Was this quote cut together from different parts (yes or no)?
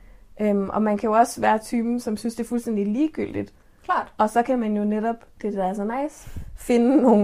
no